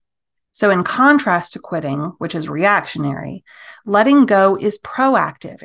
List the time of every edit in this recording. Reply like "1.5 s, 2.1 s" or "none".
none